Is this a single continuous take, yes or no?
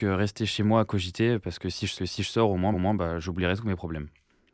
no